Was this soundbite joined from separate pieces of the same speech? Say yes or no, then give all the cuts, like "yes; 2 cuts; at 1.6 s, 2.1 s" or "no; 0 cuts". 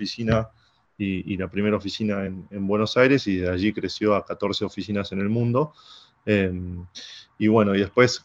no; 0 cuts